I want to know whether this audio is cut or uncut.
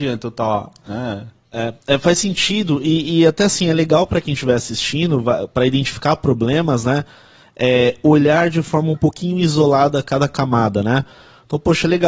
uncut